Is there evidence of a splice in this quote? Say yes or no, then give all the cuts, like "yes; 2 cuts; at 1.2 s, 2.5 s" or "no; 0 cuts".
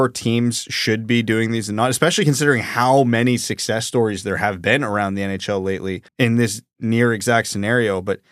yes; 1 cut; at 6.1 s